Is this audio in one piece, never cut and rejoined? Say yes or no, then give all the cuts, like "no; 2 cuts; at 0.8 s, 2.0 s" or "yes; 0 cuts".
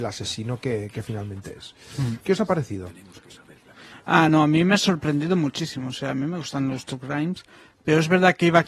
yes; 0 cuts